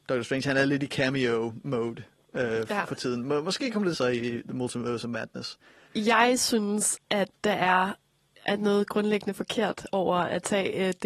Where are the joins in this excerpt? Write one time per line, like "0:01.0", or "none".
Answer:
0:03.9